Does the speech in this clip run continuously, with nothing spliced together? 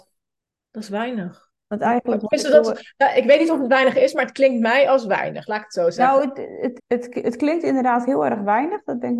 no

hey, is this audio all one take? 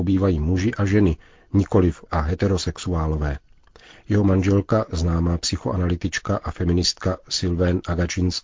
no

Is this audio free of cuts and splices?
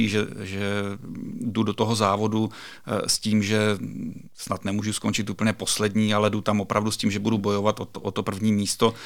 yes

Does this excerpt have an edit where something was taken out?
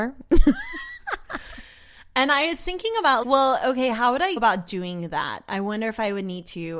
yes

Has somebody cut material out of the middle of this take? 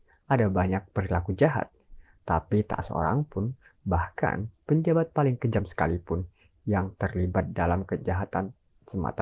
no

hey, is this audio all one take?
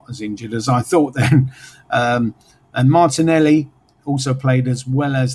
yes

